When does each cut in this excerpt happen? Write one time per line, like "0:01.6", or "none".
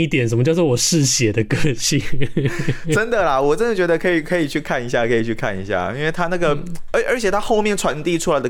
none